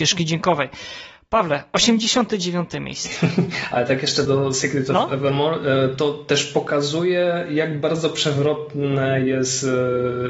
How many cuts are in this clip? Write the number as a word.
one